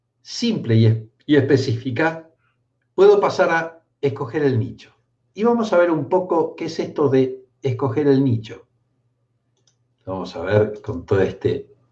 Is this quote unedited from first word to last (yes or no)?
no